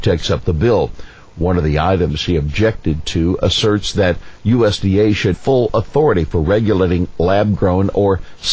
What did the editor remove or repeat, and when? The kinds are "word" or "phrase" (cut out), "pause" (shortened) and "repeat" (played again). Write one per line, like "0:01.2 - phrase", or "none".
0:05.3 - word